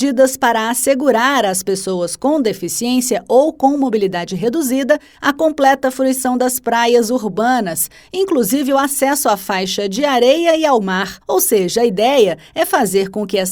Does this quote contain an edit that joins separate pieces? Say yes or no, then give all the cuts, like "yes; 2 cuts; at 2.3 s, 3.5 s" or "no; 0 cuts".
yes; 1 cut; at 11.2 s